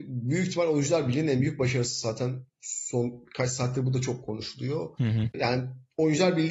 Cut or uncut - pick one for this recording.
uncut